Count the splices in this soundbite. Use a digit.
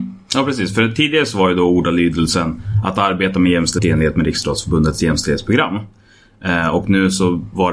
1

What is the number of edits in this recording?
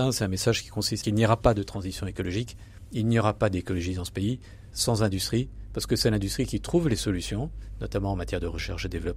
1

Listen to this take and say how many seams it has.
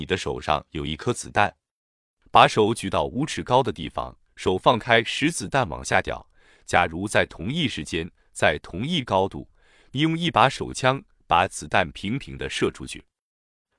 0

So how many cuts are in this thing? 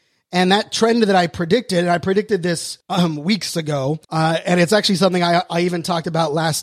2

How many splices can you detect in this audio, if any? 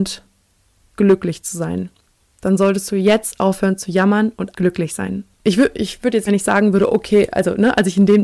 3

